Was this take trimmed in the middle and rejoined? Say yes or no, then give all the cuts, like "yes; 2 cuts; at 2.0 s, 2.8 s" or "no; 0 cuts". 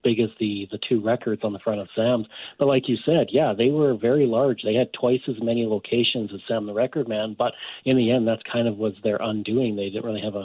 no; 0 cuts